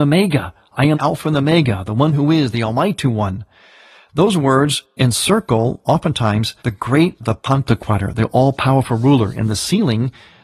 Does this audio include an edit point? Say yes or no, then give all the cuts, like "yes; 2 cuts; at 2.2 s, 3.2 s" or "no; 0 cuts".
yes; 3 cuts; at 0.9 s, 6.6 s, 7.2 s